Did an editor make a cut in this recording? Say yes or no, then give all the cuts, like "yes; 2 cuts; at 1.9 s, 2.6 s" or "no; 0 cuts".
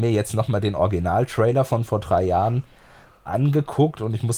no; 0 cuts